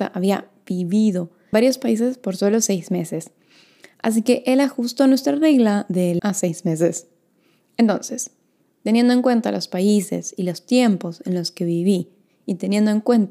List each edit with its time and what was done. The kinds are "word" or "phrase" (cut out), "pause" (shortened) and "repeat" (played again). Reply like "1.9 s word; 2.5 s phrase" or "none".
1.5 s word; 6.2 s word